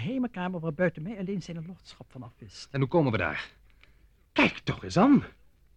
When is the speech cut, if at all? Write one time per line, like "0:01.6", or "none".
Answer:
none